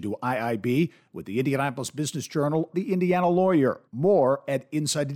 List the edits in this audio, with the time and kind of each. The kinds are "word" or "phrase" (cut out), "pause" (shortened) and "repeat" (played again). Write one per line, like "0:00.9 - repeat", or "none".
0:02.7 - word
0:03.9 - pause